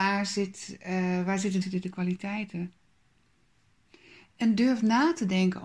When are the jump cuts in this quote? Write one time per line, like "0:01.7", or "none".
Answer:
0:01.6

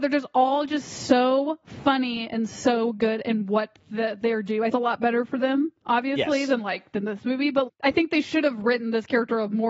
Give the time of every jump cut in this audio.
0:04.7
0:07.7

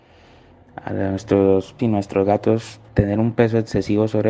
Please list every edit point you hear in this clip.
0:01.8
0:02.9

